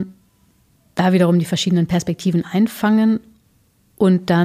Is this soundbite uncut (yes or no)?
yes